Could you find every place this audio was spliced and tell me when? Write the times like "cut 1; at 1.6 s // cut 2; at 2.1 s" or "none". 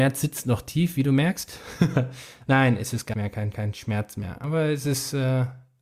cut 1; at 3.1 s // cut 2; at 3.5 s